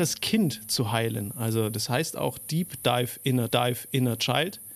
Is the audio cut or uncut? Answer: cut